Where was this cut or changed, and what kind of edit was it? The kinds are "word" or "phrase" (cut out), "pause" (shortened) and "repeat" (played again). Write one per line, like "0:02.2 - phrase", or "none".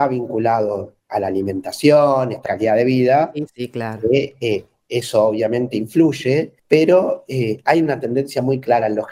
0:02.5 - phrase
0:06.6 - pause